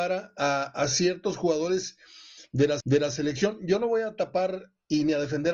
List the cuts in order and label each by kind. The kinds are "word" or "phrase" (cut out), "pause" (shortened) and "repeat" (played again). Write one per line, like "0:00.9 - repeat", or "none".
0:02.8 - repeat